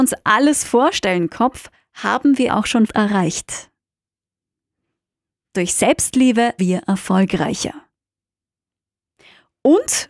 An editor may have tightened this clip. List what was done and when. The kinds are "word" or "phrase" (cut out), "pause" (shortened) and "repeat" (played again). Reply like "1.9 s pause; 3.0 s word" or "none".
1.3 s phrase; 2.5 s word; 2.9 s word; 6.6 s word